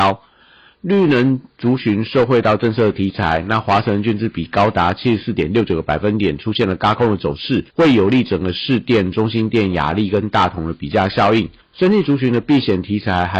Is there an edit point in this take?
yes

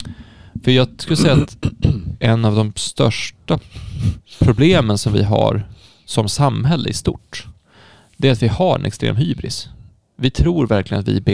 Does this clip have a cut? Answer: no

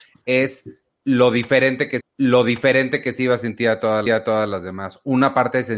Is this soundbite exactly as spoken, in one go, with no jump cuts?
no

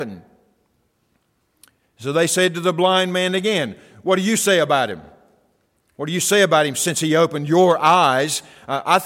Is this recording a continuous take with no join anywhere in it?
yes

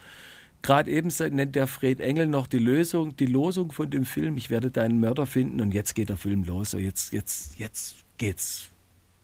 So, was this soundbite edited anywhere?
no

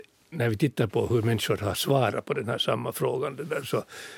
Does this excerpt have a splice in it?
no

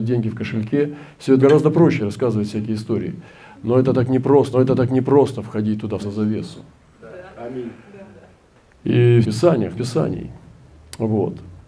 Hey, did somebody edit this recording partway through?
yes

